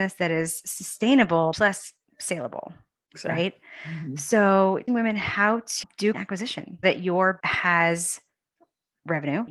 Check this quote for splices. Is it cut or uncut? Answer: cut